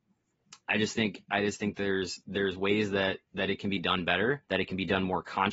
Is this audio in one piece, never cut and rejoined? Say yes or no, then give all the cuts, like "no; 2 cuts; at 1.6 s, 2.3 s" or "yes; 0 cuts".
no; 2 cuts; at 3.2 s, 4.4 s